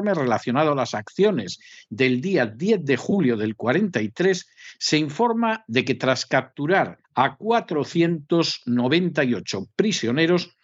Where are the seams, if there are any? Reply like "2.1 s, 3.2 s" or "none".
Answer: 7.0 s